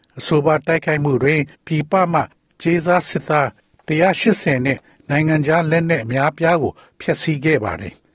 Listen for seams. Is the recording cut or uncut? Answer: cut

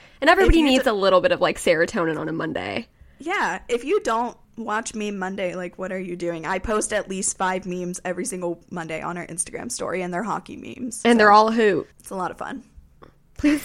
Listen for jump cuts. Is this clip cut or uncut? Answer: cut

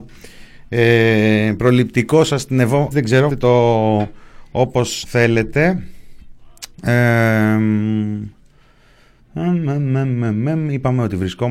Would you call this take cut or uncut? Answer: cut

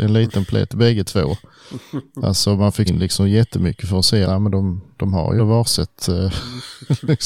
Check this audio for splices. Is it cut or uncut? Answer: cut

